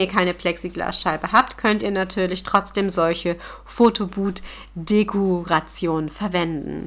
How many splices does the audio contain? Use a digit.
0